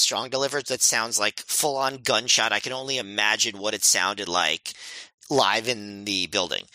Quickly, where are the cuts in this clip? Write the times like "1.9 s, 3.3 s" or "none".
5.2 s